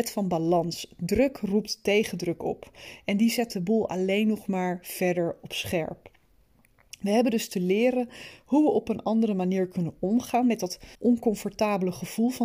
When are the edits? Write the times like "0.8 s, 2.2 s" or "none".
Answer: 10.9 s